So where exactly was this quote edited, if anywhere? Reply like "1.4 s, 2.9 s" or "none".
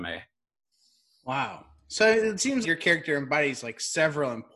2.6 s